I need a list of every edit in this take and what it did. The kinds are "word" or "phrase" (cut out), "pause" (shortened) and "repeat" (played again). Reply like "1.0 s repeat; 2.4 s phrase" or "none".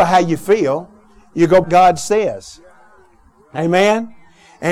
1.6 s word

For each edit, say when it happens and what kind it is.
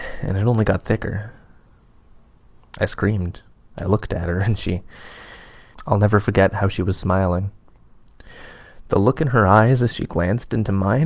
3.5 s pause

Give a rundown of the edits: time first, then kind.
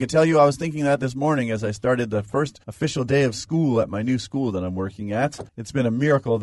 2.6 s pause; 5.5 s pause

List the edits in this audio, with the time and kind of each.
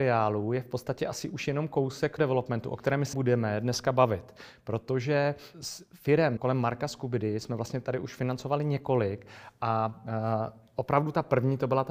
2.2 s word; 3.1 s word; 5.5 s word; 6.4 s word

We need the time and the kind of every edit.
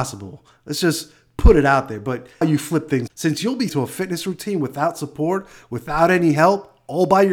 2.4 s phrase; 3.1 s word; 3.7 s word

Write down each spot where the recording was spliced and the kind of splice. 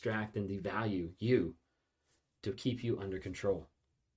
none

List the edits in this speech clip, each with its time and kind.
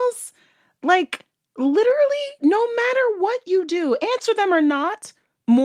none

